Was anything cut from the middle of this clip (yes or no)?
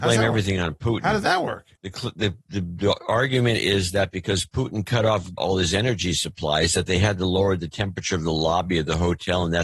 yes